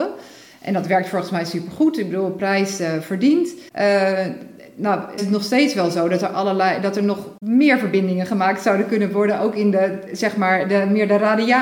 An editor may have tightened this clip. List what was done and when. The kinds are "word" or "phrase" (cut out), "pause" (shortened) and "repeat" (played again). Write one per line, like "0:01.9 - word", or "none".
0:03.7 - pause
0:05.2 - phrase
0:07.4 - pause